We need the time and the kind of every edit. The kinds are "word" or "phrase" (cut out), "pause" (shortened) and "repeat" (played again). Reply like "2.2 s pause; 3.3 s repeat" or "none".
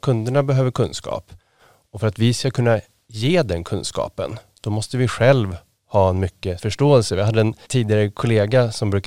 6.6 s word; 7.6 s word